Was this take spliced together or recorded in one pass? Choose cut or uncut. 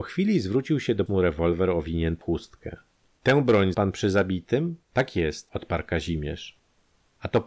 cut